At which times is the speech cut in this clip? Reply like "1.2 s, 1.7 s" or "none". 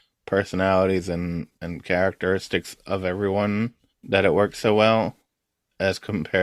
1.6 s, 3.9 s